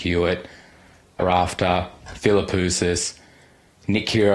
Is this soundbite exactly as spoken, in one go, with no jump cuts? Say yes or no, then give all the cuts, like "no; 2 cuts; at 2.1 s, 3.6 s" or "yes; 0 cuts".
no; 1 cut; at 1.2 s